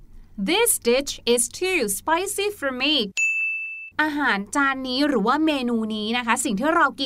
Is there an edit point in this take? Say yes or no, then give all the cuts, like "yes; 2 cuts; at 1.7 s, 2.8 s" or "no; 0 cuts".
no; 0 cuts